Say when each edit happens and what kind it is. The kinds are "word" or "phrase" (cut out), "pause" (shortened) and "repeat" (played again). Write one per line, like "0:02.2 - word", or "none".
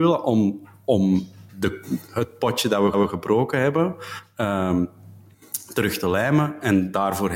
0:01.5 - word
0:02.9 - repeat